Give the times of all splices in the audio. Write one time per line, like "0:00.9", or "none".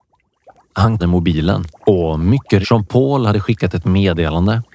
0:01.0
0:01.8
0:02.6